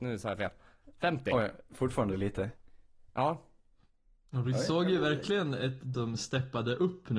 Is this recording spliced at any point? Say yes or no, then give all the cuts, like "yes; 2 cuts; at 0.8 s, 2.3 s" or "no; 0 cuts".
yes; 1 cut; at 5.9 s